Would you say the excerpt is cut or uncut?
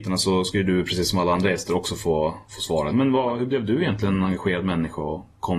cut